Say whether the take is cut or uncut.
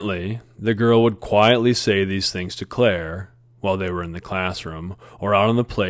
uncut